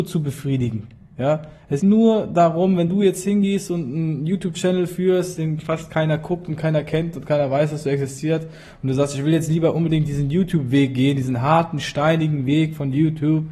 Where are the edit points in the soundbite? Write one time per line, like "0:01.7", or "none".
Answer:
0:01.8